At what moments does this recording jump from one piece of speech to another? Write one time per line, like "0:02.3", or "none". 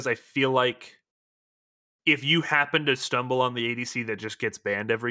none